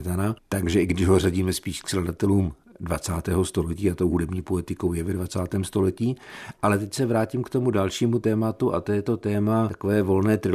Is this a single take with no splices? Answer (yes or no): yes